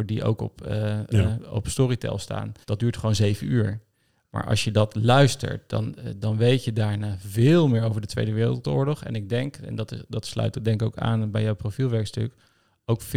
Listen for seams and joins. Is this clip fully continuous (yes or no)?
no